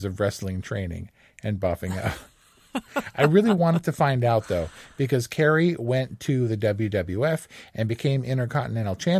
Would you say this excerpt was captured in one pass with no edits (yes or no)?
yes